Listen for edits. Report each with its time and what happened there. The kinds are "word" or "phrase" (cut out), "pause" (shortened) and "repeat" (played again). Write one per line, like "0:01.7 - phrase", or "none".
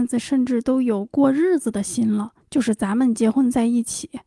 none